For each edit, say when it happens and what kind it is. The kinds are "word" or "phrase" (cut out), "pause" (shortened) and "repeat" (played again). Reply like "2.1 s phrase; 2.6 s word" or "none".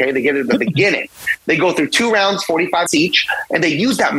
2.9 s word